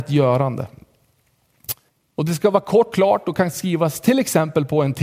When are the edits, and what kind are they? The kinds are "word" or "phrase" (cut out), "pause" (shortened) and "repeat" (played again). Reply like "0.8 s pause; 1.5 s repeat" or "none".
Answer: 1.9 s pause; 2.9 s word